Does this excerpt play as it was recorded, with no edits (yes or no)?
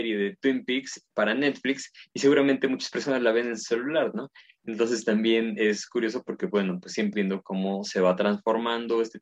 no